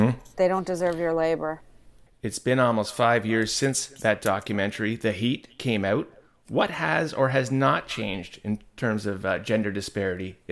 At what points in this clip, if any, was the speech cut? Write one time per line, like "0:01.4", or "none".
none